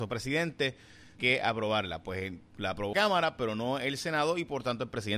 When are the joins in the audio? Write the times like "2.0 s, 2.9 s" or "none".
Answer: 1.2 s, 2.9 s

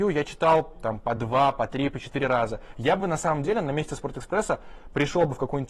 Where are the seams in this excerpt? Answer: none

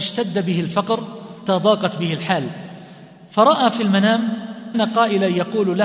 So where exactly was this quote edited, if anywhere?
1.5 s, 4.7 s

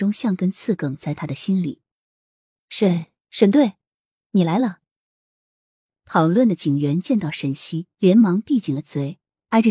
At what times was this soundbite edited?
7.9 s

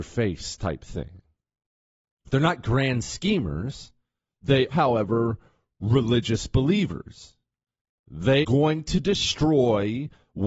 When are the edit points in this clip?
4.7 s, 8.4 s

